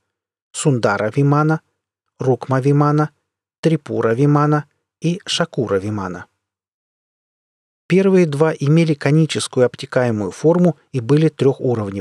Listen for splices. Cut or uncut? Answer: uncut